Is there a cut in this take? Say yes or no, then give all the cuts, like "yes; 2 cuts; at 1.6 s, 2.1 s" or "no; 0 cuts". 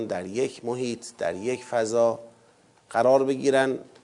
no; 0 cuts